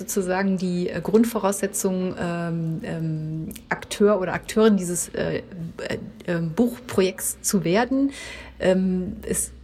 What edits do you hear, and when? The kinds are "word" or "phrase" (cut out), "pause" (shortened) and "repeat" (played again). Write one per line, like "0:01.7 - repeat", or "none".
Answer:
0:02.1 - word